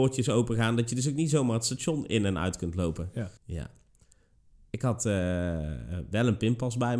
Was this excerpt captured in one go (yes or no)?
no